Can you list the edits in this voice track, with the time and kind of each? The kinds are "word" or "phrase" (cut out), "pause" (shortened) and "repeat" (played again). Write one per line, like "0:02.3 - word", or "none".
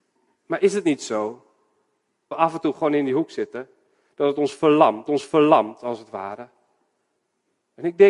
0:02.3 - word
0:05.1 - repeat